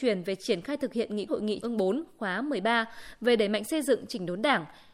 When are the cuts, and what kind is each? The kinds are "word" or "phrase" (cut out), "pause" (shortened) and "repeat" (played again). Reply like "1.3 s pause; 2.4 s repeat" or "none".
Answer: 1.3 s word; 1.6 s word